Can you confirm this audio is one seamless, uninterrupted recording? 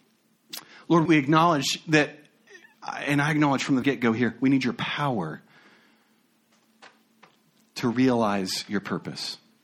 no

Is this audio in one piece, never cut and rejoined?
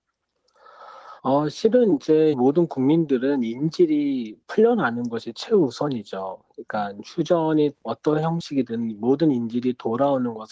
no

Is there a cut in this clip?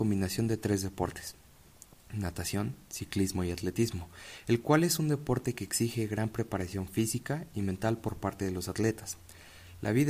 no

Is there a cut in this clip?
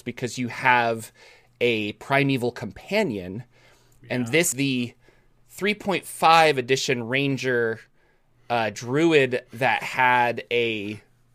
yes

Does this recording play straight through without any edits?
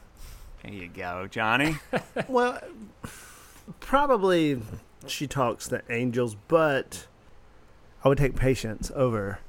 yes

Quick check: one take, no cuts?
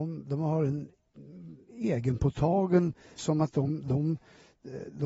no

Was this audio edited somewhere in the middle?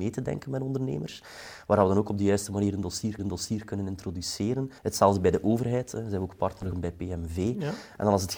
yes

